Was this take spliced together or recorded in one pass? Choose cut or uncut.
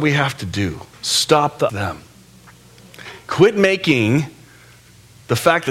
cut